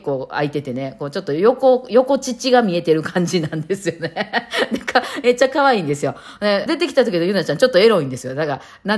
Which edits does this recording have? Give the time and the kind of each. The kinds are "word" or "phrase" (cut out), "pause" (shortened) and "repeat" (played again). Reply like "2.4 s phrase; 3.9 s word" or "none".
6.7 s phrase